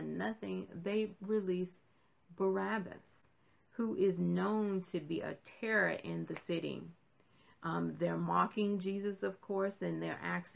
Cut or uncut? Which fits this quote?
uncut